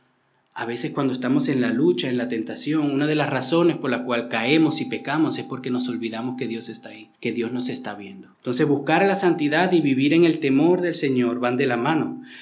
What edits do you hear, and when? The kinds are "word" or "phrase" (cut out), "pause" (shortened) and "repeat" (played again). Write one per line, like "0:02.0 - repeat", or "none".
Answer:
0:07.1 - pause
0:08.3 - pause